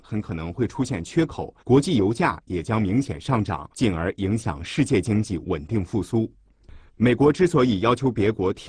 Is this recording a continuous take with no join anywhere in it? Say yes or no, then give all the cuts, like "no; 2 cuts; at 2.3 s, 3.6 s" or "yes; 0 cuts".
no; 3 cuts; at 1.6 s, 3.7 s, 6.9 s